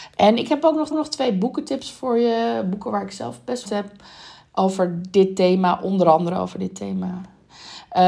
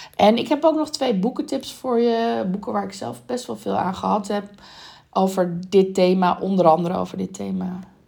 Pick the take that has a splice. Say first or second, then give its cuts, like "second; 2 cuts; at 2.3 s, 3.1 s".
first; 2 cuts; at 0.9 s, 3.6 s